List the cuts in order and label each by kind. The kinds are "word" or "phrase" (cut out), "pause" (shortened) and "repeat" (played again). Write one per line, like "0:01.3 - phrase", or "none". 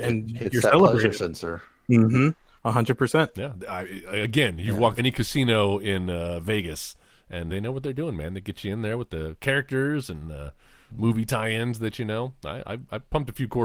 0:05.0 - word
0:07.5 - word